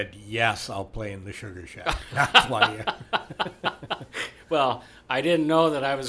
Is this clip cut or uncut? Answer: uncut